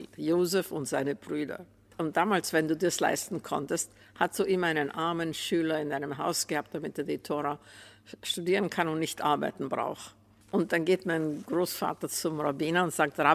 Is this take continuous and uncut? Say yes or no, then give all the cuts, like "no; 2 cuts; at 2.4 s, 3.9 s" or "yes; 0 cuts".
yes; 0 cuts